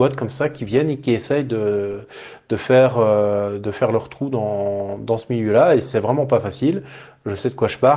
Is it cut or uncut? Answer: uncut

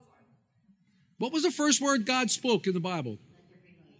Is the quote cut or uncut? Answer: uncut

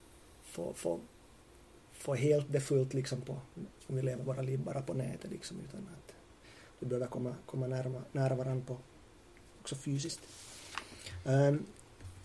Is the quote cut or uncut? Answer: uncut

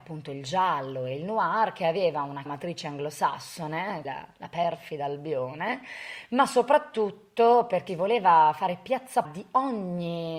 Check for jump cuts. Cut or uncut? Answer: cut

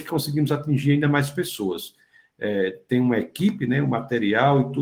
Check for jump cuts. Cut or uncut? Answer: uncut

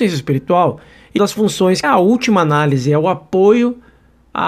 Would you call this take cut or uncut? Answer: cut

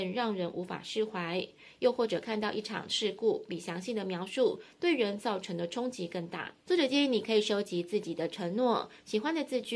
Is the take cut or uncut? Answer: cut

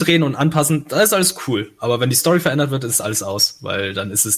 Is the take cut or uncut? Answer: uncut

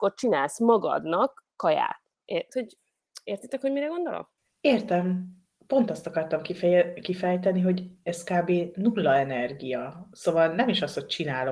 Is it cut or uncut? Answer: cut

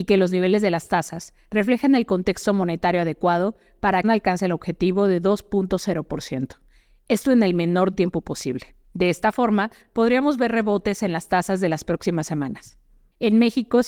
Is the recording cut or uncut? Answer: cut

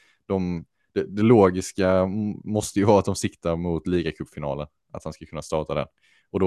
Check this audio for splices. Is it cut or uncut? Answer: uncut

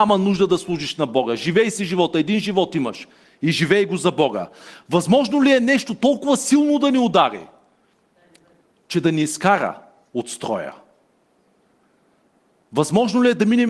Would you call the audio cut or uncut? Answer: uncut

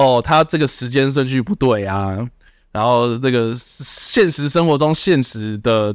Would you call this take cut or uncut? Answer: uncut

